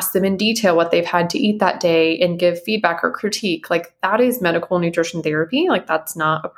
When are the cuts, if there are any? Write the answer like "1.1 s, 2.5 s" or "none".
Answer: none

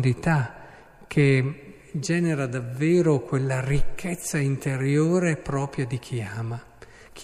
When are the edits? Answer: none

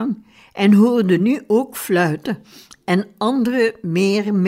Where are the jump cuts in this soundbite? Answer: none

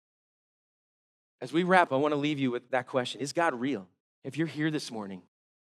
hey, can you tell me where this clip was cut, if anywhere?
1.9 s, 4.0 s

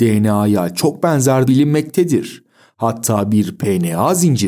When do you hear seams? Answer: 1.5 s

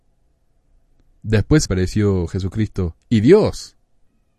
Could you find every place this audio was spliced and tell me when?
1.6 s, 3.0 s

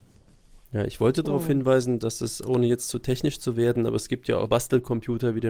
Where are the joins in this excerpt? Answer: 4.5 s

